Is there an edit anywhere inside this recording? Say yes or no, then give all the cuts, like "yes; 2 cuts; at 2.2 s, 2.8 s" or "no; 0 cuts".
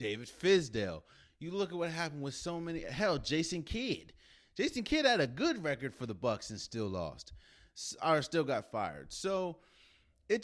no; 0 cuts